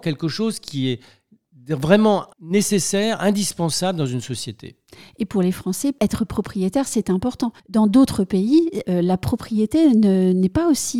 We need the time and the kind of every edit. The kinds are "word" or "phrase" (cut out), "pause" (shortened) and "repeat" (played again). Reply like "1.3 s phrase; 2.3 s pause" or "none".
2.3 s pause; 7.6 s pause